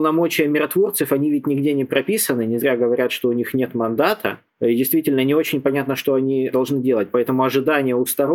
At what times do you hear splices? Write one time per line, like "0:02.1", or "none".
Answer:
none